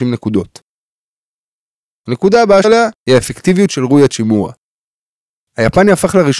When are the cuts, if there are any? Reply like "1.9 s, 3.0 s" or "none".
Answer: 2.6 s, 3.0 s